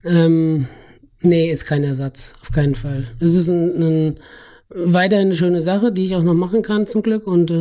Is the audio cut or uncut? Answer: uncut